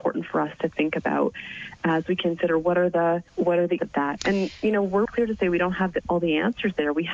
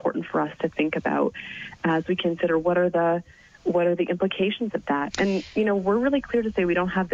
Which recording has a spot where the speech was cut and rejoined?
first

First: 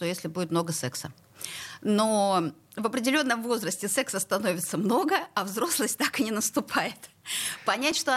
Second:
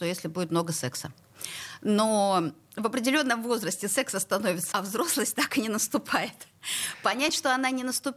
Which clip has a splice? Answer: second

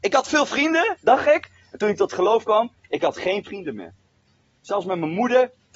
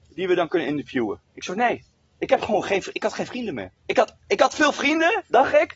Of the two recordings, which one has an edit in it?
second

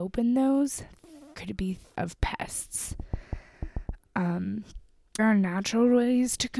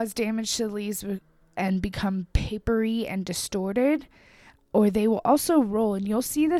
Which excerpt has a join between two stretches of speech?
first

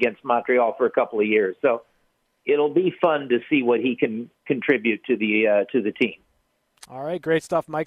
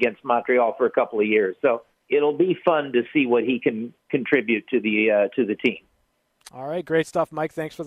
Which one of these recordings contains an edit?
second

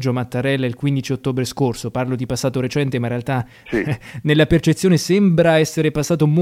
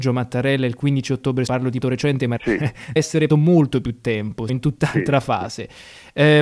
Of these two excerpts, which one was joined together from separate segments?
second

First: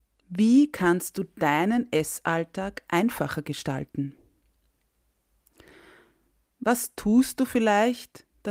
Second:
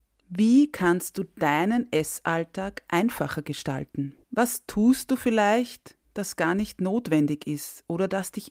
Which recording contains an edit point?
second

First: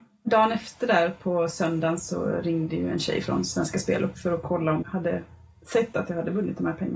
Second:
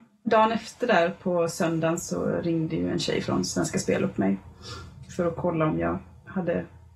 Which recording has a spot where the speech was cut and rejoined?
first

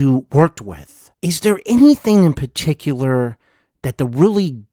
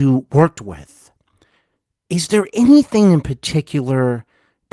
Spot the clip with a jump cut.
first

